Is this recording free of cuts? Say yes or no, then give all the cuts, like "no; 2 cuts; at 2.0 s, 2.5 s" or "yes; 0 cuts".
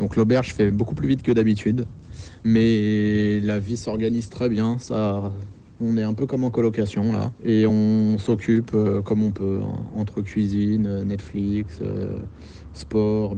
yes; 0 cuts